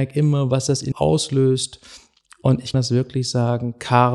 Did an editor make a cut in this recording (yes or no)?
yes